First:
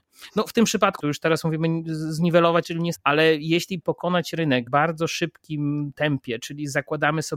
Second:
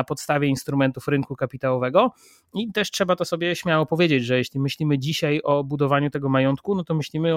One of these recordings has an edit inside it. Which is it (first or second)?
first